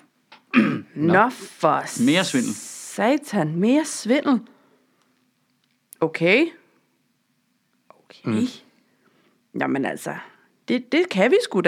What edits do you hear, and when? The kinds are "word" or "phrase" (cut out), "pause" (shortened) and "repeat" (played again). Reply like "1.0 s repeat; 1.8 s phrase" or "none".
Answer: none